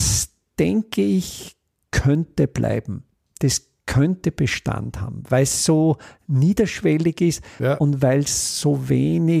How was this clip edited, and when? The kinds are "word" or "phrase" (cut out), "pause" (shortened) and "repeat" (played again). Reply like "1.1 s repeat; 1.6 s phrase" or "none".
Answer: none